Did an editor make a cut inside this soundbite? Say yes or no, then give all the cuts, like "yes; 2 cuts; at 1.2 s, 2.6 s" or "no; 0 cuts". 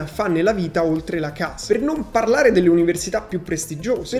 no; 0 cuts